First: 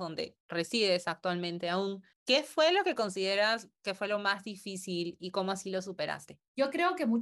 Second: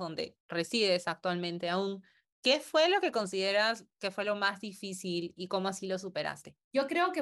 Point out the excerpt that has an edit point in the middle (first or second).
first